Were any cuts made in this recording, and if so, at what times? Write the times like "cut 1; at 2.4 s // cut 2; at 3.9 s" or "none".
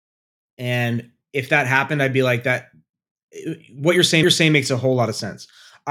cut 1; at 4.2 s

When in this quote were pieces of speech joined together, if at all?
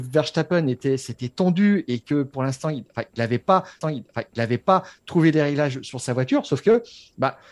cut 1; at 3.8 s

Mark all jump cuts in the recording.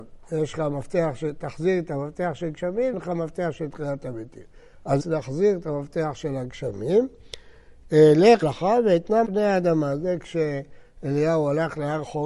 cut 1; at 2.9 s // cut 2; at 5.0 s // cut 3; at 8.4 s // cut 4; at 9.2 s

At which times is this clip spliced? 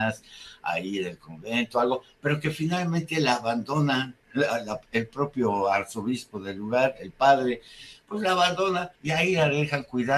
cut 1; at 9.0 s

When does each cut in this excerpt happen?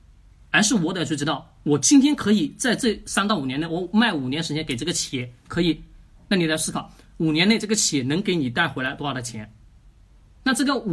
none

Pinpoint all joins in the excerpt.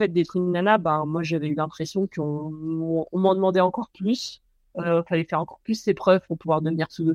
none

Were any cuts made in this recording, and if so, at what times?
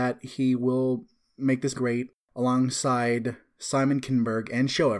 cut 1; at 1.7 s

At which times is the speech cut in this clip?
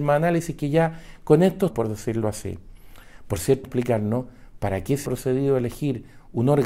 cut 1; at 1.7 s // cut 2; at 3.6 s // cut 3; at 5.0 s

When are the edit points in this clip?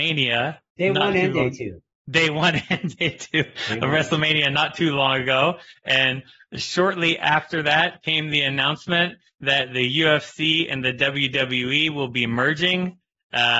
none

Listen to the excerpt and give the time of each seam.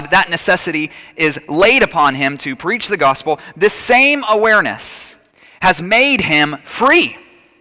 cut 1; at 5.3 s

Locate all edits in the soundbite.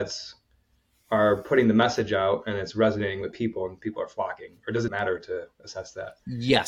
cut 1; at 4.9 s

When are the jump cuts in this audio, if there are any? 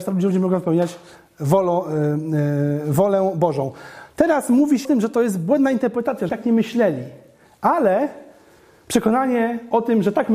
cut 1; at 4.8 s // cut 2; at 6.3 s

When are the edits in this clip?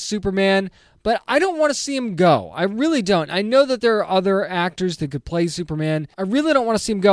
cut 1; at 6.1 s

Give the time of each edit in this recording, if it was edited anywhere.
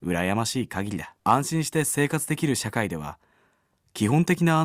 cut 1; at 1.2 s

